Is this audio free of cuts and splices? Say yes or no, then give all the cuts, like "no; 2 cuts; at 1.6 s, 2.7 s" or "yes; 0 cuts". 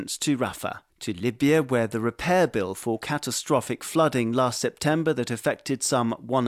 no; 1 cut; at 0.9 s